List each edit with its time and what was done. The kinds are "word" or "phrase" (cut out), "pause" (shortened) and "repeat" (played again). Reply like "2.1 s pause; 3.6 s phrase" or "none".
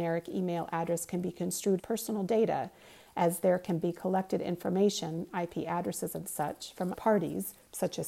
1.8 s word; 6.9 s word